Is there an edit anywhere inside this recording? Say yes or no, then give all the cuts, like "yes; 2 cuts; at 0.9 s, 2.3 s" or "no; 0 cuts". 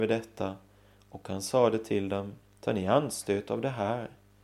yes; 1 cut; at 2.4 s